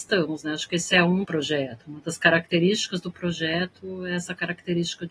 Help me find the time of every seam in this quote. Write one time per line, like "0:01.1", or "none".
0:01.2